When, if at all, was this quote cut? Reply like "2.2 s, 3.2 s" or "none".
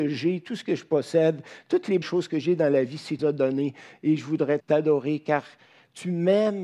2.0 s, 3.2 s, 4.6 s